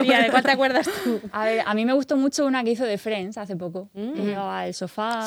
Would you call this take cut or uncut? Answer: uncut